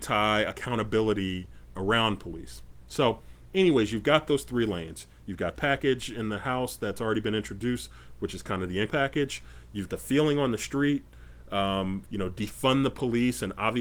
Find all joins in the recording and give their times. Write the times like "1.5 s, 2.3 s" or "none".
1.7 s, 5.5 s, 8.9 s, 9.9 s, 12.0 s

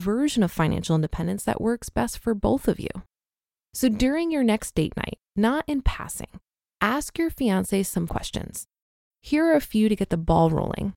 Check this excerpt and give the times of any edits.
8.1 s

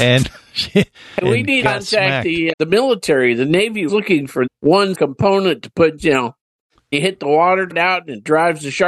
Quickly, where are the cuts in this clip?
1.2 s, 1.6 s, 2.5 s, 3.9 s, 4.5 s, 4.9 s, 6.0 s, 6.9 s, 7.7 s

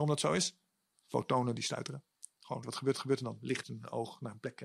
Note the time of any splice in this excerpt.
2.6 s, 2.9 s, 3.6 s

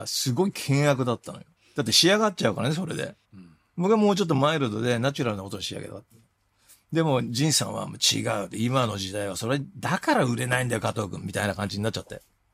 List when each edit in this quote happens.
1.6 s, 3.2 s

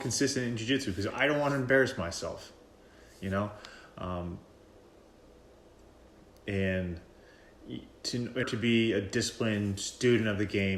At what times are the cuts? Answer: 1.1 s, 8.4 s

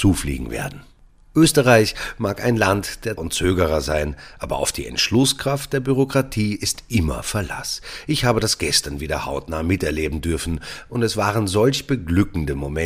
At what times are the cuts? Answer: 3.2 s

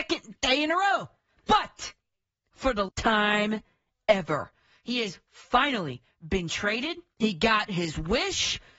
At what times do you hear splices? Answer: 2.9 s

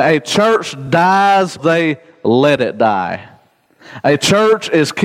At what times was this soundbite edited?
1.6 s

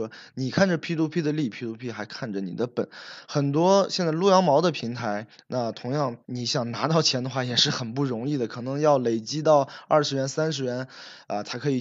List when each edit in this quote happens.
5.3 s, 6.2 s

